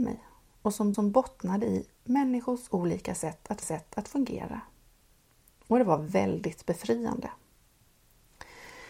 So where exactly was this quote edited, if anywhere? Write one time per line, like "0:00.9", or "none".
0:00.9
0:03.6